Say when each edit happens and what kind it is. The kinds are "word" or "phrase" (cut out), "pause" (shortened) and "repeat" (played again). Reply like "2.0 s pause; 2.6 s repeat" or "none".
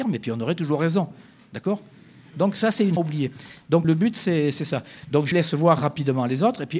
3.0 s phrase; 3.8 s word; 5.3 s word

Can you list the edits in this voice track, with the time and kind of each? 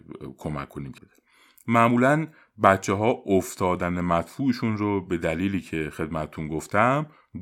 1.0 s word

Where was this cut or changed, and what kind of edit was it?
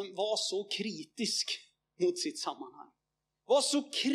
none

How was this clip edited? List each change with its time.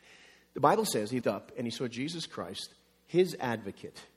1.2 s word

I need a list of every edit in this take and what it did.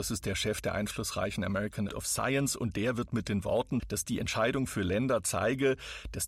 1.9 s phrase; 3.8 s word

